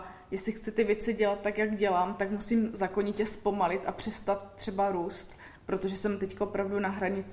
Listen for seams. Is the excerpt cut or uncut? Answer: cut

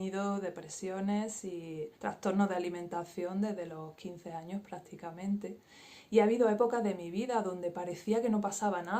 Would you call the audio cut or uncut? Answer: cut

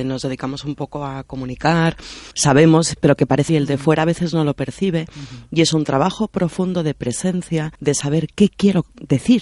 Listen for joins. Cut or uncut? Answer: cut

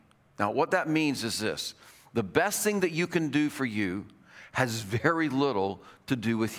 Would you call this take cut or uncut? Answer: uncut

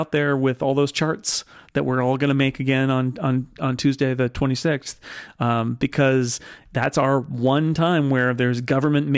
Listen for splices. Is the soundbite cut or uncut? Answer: uncut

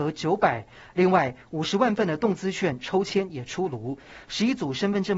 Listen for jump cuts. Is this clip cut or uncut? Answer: uncut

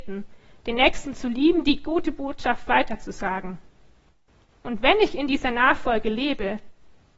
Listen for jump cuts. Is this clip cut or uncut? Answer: uncut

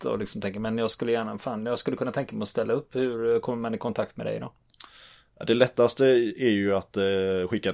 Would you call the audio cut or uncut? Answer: uncut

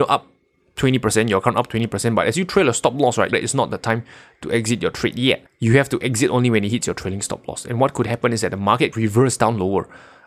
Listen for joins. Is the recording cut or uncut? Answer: cut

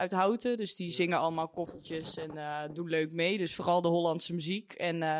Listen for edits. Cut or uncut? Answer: uncut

